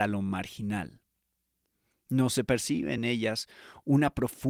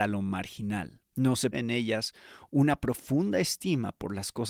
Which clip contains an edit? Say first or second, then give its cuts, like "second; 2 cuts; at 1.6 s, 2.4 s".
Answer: second; 2 cuts; at 1.1 s, 1.5 s